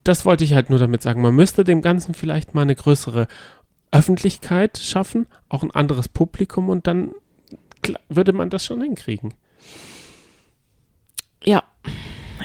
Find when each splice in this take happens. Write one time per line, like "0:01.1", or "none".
none